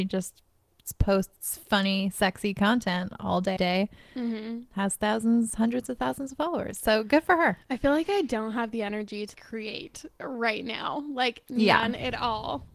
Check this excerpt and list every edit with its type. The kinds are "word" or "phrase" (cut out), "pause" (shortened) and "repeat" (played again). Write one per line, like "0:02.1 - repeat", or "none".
0:03.6 - word
0:09.3 - word